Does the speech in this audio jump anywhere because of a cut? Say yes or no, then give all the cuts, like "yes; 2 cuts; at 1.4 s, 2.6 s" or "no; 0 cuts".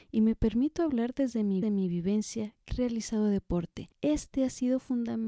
yes; 3 cuts; at 1.6 s, 2.7 s, 3.9 s